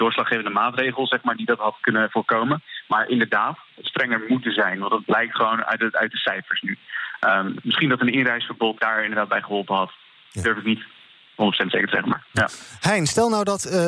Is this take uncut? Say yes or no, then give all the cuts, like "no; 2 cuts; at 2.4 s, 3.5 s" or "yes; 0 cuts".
no; 2 cuts; at 3.8 s, 8.8 s